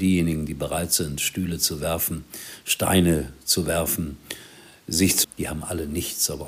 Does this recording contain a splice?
yes; 1 cut; at 5.2 s

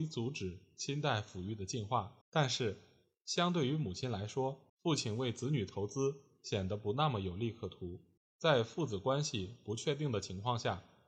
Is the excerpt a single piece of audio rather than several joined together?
no; 3 cuts; at 2.2 s, 4.7 s, 8.2 s

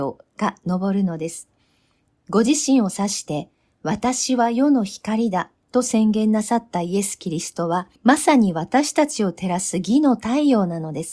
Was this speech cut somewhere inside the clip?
yes; 1 cut; at 8.0 s

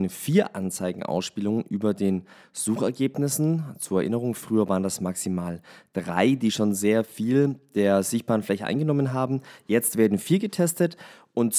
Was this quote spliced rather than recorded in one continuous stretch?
no; 0 cuts

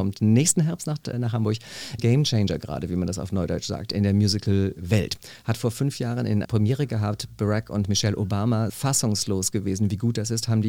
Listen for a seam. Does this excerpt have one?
yes; 4 cuts; at 1.1 s, 2.0 s, 6.4 s, 8.7 s

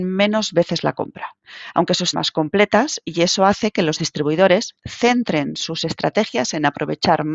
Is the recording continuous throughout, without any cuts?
no; 1 cut; at 2.1 s

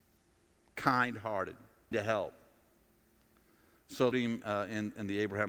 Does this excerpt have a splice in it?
yes; 2 cuts; at 1.9 s, 4.1 s

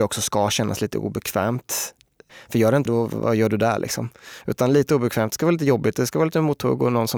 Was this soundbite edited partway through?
yes; 1 cut; at 2.9 s

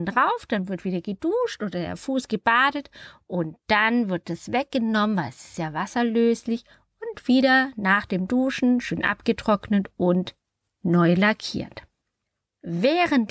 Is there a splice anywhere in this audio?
no; 0 cuts

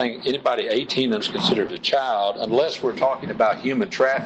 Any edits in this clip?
yes; 1 cut; at 1.2 s

